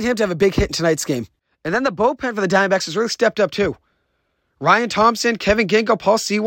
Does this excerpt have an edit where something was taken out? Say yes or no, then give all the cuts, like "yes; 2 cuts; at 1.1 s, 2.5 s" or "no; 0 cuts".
no; 0 cuts